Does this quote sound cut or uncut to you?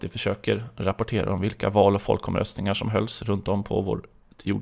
uncut